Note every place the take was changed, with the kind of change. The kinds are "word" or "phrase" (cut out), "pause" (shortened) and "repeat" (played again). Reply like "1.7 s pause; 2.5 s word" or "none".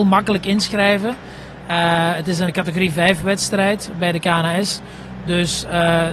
2.5 s word